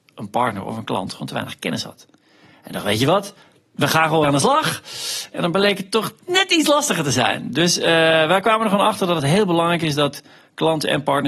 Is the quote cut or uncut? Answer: cut